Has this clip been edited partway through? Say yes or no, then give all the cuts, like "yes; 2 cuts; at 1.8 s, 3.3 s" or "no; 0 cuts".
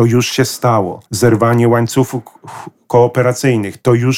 yes; 1 cut; at 1.1 s